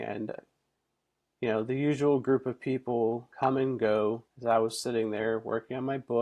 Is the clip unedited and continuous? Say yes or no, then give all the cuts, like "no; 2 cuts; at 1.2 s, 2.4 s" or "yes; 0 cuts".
no; 2 cuts; at 3.3 s, 4.3 s